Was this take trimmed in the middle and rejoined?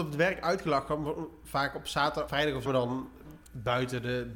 yes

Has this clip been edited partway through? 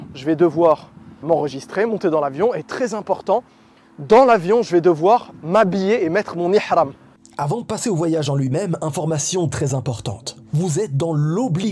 yes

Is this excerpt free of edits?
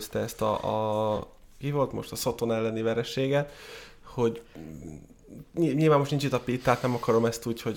yes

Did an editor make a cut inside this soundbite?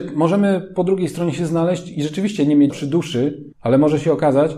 yes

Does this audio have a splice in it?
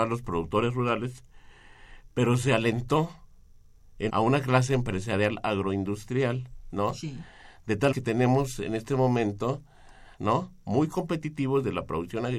yes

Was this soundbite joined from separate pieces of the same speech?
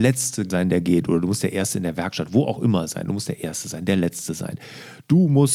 no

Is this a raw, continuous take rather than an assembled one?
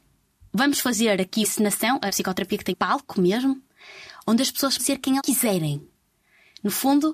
no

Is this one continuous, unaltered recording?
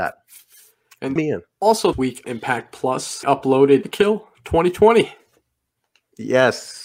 no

